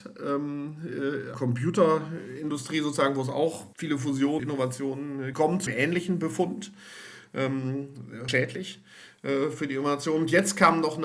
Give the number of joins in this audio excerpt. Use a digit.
6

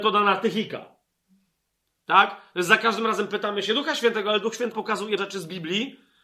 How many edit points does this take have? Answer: 2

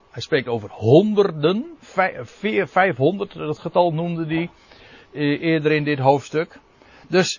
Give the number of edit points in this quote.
0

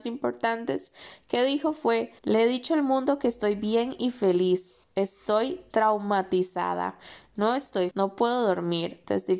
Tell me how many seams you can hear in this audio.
3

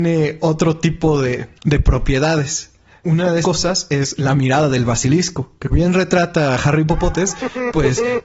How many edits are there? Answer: 3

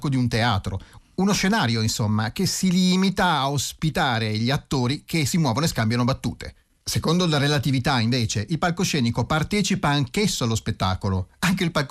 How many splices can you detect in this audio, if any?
0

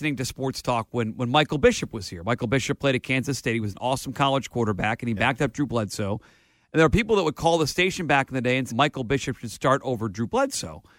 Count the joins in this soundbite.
1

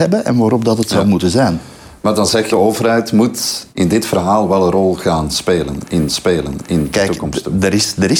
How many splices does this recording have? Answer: 3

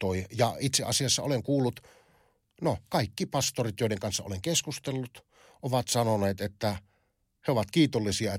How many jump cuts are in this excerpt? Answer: 0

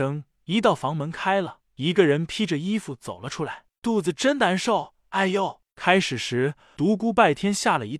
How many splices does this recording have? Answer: 0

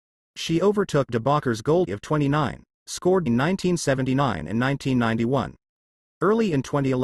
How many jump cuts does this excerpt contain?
3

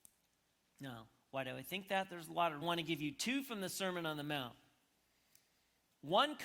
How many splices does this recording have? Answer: 1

